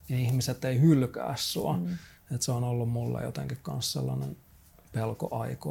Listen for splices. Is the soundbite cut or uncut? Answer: uncut